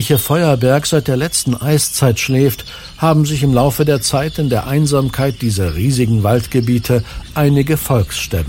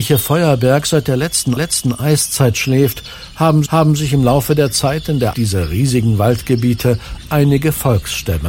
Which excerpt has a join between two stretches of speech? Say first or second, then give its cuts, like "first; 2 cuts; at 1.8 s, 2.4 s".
second; 3 cuts; at 1.6 s, 3.7 s, 5.3 s